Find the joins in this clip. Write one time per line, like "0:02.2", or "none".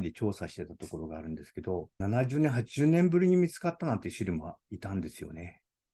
0:01.9